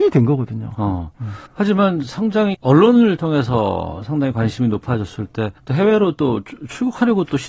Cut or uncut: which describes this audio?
cut